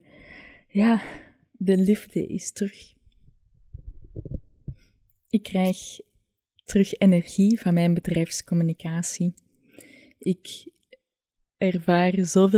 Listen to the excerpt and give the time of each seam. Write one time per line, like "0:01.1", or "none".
none